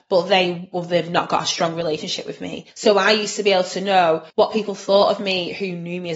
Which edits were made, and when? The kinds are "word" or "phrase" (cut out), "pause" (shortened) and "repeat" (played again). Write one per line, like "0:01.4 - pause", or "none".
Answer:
0:02.7 - pause
0:04.3 - pause